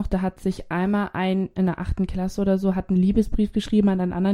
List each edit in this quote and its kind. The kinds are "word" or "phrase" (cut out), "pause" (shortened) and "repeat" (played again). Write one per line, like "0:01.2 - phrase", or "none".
0:01.6 - word